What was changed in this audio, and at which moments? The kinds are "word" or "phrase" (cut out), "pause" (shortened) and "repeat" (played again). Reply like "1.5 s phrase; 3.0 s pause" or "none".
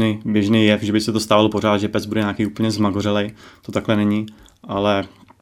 none